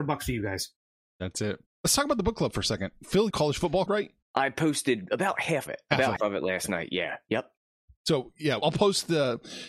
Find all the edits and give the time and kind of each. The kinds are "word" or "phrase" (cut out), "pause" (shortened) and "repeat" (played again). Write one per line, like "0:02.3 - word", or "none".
0:01.7 - pause
0:03.3 - phrase
0:03.9 - word
0:04.2 - pause
0:05.7 - word
0:06.2 - word
0:08.6 - word